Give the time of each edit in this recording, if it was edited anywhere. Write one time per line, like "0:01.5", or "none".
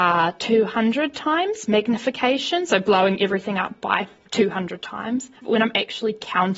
0:05.4